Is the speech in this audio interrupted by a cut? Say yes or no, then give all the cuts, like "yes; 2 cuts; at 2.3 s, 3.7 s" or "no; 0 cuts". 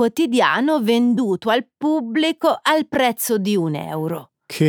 no; 0 cuts